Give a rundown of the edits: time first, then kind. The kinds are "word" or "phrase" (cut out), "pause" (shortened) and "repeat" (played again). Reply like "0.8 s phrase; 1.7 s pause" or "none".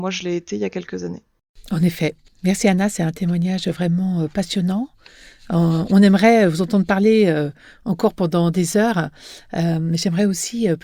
none

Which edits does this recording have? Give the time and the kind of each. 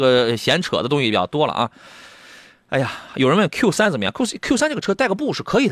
none

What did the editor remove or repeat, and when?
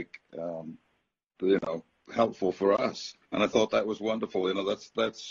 1.4 s phrase; 3.2 s pause

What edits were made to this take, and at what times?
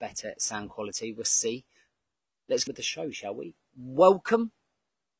2.7 s word

